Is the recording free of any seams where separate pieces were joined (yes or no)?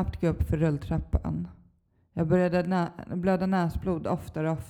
yes